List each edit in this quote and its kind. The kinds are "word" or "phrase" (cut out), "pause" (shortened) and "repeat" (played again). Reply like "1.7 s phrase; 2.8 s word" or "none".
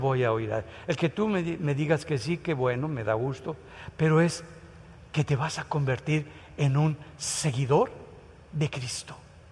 none